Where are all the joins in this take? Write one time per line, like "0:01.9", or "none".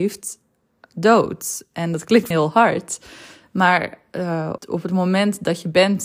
0:02.3
0:04.6